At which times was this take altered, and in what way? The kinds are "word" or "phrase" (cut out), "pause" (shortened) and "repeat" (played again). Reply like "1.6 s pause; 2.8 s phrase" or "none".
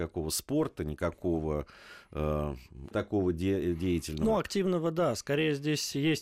2.9 s word